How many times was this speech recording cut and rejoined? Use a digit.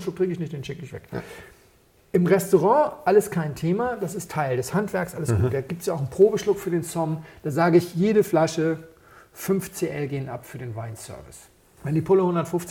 0